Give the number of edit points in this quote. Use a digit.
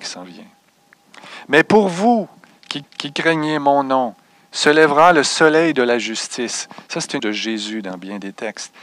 2